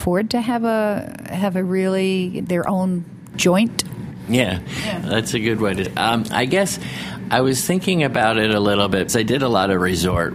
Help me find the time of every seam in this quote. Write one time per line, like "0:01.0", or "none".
0:02.4
0:05.8
0:09.1